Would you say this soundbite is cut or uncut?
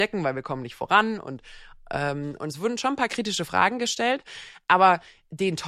uncut